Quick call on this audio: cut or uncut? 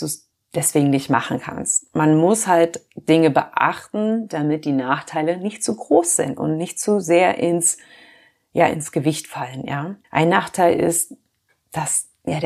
cut